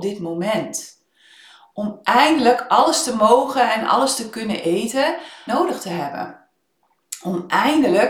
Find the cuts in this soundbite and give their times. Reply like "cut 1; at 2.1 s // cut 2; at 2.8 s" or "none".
cut 1; at 5.5 s